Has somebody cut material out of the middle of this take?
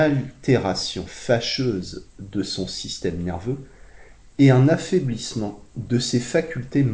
no; 0 cuts

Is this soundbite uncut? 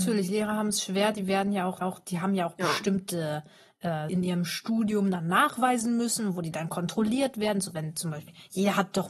no; 2 cuts; at 1.8 s, 4.1 s

